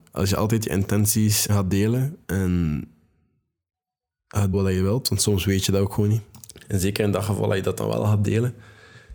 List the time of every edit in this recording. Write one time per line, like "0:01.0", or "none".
0:01.5
0:02.2
0:04.5